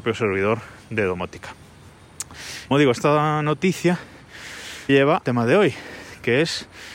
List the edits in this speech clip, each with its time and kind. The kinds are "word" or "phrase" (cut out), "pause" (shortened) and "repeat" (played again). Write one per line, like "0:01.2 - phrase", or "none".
0:02.7 - word
0:04.9 - word
0:05.2 - word

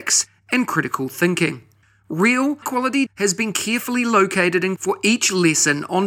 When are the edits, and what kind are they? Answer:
0:02.6 - word
0:03.1 - word
0:04.8 - word

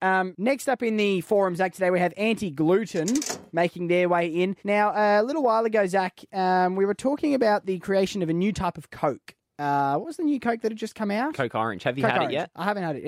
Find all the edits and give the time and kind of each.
0:03.5 - pause
0:04.6 - pause

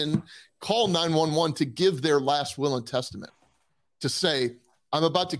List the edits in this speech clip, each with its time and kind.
none

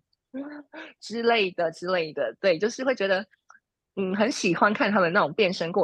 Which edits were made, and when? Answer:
none

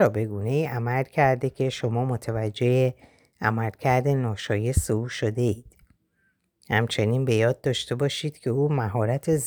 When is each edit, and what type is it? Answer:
none

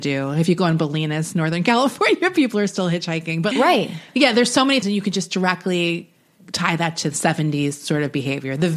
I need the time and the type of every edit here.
0:03.5 - word
0:04.8 - word

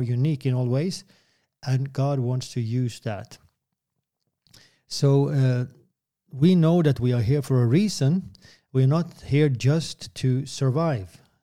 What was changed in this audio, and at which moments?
none

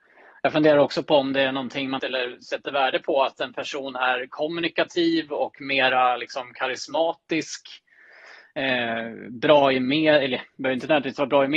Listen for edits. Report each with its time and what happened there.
0:02.0 - phrase

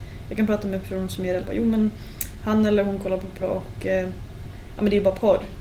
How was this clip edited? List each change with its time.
0:01.4 - word
0:03.4 - word

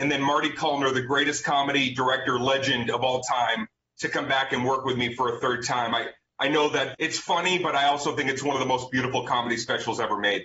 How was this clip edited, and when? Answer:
0:06.9 - word

